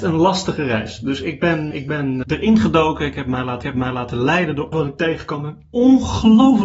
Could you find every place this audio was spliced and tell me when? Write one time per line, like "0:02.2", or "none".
0:01.7
0:02.2
0:03.6
0:04.7